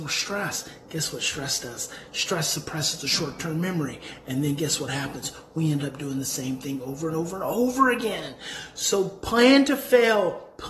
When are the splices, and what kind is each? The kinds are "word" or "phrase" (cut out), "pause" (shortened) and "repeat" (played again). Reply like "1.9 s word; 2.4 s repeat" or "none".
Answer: none